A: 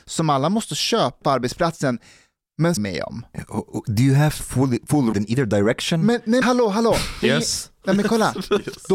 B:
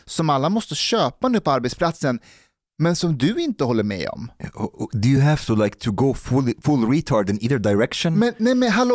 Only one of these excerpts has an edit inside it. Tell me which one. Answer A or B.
A